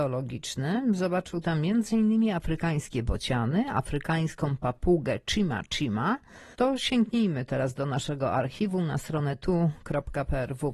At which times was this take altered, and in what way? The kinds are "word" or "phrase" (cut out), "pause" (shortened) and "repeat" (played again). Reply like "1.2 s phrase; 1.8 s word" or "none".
6.5 s pause